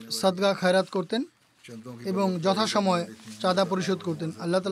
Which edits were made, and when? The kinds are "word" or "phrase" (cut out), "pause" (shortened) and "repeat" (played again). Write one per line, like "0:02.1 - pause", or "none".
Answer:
none